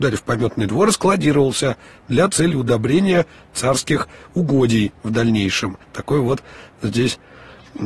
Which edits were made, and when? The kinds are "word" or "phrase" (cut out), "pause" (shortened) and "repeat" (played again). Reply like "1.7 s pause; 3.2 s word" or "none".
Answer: 5.8 s pause